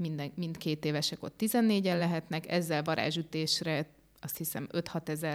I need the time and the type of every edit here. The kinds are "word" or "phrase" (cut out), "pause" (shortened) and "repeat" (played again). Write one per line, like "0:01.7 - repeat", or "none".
none